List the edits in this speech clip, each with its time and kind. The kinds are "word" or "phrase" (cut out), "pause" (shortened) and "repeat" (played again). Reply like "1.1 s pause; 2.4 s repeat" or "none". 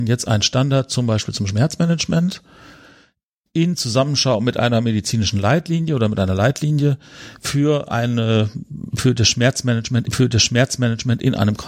10.0 s repeat